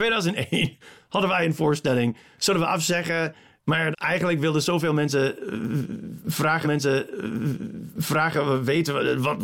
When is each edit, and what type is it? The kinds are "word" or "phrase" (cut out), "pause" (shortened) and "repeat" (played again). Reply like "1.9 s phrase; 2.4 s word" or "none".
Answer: 3.9 s word; 6.6 s repeat